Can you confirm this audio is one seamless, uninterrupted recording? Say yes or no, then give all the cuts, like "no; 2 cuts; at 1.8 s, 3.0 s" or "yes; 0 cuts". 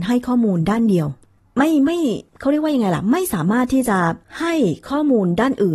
no; 3 cuts; at 1.4 s, 2.3 s, 4.2 s